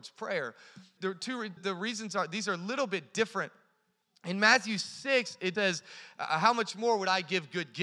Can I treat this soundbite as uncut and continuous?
no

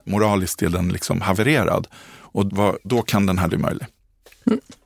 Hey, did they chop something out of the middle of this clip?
yes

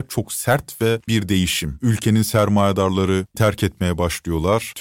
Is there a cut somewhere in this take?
yes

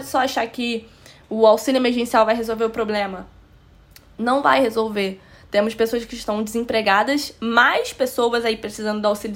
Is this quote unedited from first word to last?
yes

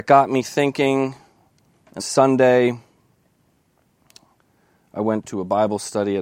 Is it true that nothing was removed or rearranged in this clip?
no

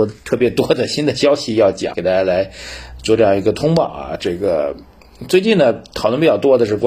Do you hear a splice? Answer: yes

